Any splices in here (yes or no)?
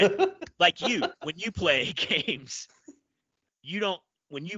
no